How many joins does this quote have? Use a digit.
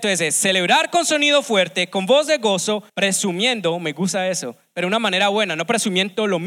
1